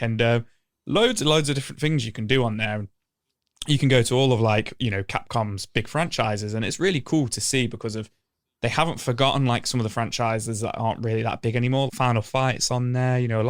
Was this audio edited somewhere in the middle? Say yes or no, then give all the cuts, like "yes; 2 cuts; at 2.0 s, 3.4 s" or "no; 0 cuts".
yes; 1 cut; at 11.9 s